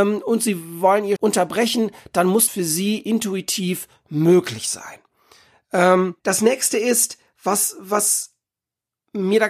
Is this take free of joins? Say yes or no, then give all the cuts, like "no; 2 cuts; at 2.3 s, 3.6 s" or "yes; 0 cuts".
no; 3 cuts; at 1.2 s, 2.5 s, 6.2 s